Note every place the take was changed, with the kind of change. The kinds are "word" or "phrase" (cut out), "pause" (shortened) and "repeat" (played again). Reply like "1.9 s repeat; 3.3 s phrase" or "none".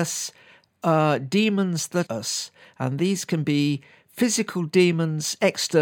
2.1 s word